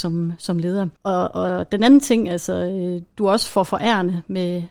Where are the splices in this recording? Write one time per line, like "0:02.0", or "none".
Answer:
0:01.0